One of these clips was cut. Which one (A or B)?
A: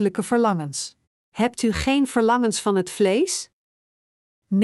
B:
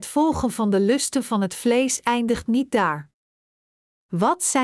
A